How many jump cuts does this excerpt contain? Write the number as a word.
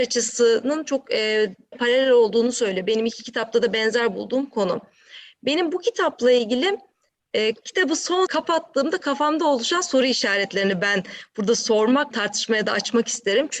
three